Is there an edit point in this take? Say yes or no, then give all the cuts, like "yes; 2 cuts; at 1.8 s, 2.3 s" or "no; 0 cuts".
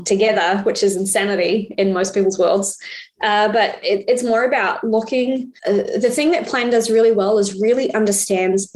yes; 1 cut; at 5.6 s